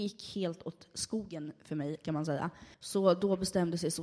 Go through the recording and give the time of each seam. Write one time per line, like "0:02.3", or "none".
0:02.7